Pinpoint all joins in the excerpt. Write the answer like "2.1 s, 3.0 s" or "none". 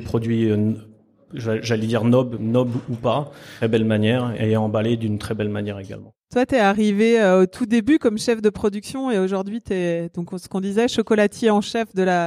3.6 s, 4.4 s, 6.2 s

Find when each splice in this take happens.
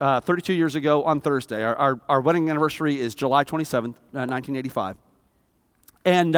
none

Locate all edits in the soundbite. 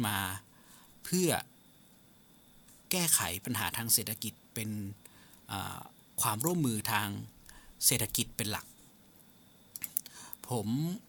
none

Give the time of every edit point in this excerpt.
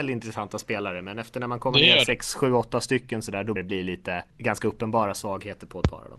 3.6 s, 4.3 s

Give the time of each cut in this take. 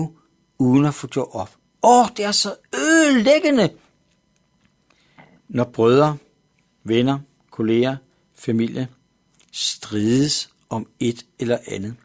2.6 s

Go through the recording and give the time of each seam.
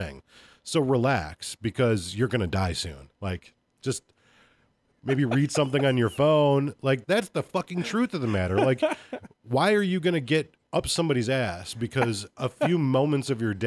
7.0 s, 10.6 s

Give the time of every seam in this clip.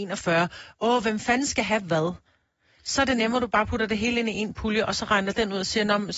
none

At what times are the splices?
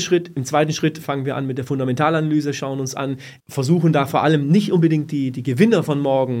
3.4 s

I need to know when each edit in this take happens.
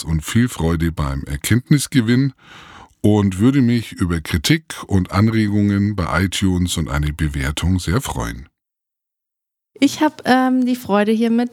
none

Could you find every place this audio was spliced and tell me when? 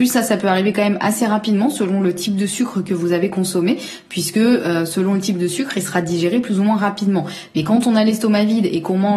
none

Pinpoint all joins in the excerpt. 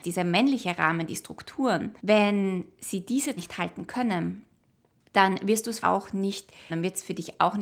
2.0 s, 3.4 s, 5.8 s, 6.7 s

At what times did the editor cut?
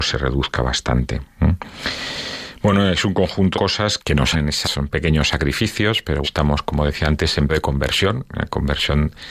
3.5 s, 4.0 s, 4.3 s, 4.6 s, 6.2 s, 7.5 s

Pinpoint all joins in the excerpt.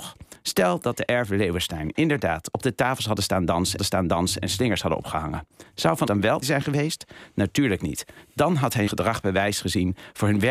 3.8 s, 6.1 s, 6.4 s, 8.9 s

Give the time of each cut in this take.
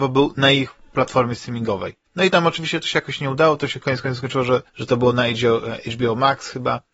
2.1 s, 4.7 s

